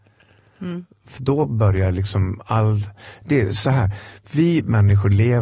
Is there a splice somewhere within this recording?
yes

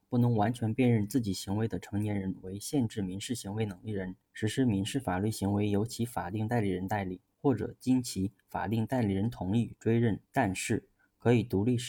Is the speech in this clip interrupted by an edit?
yes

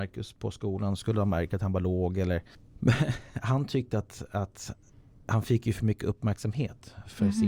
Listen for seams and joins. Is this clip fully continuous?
yes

